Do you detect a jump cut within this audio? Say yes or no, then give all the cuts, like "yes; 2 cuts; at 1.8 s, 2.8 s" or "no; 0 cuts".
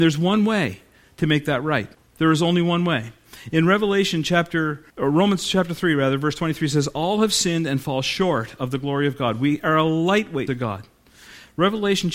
yes; 3 cuts; at 1.9 s, 4.9 s, 10.5 s